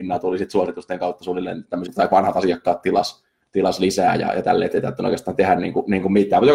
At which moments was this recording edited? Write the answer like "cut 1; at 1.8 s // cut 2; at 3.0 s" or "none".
cut 1; at 1.9 s